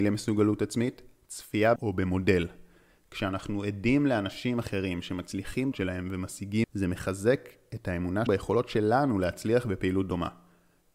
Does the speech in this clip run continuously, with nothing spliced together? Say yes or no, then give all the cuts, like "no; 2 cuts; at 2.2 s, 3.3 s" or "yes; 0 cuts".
no; 4 cuts; at 1.8 s, 5.7 s, 6.6 s, 8.3 s